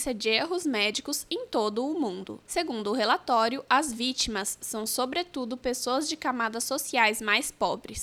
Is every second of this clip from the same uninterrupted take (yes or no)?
yes